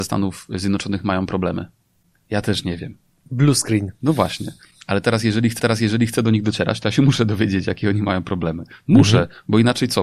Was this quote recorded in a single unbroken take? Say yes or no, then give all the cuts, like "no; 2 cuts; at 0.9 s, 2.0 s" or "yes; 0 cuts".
no; 1 cut; at 5.6 s